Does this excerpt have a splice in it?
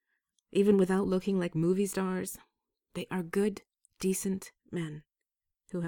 no; 0 cuts

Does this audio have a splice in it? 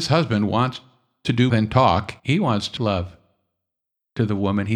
yes; 3 cuts; at 1.5 s, 2.2 s, 2.8 s

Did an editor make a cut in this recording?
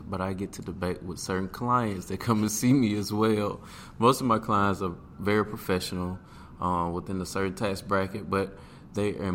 no; 0 cuts

